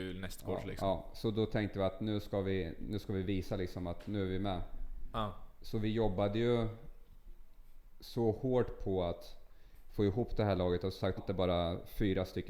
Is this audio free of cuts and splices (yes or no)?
no